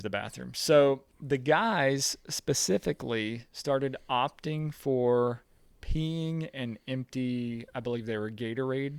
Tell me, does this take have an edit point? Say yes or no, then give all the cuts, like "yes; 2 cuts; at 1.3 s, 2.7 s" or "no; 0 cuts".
no; 0 cuts